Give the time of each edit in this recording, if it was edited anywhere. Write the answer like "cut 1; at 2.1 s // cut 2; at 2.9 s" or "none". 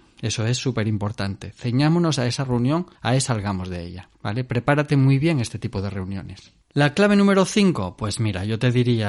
cut 1; at 2.9 s // cut 2; at 3.3 s // cut 3; at 4.1 s // cut 4; at 6.6 s